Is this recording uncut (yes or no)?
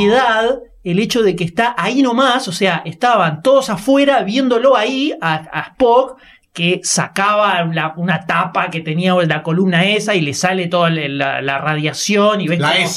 yes